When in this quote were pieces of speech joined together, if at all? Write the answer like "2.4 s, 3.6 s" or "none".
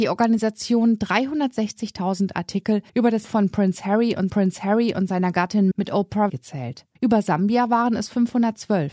2.9 s, 3.2 s, 4.3 s, 5.7 s, 6.3 s, 7.0 s